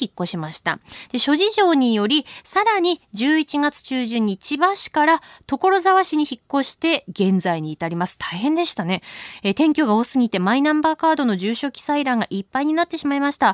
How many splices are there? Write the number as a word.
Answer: zero